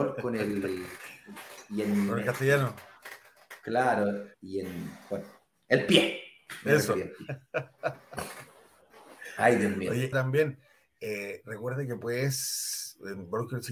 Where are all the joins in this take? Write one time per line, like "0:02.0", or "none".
0:04.3
0:10.1